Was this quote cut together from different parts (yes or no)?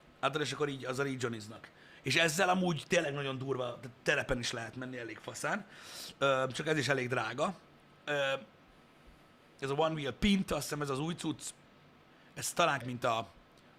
yes